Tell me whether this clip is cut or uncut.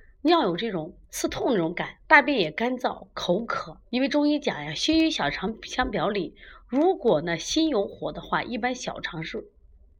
cut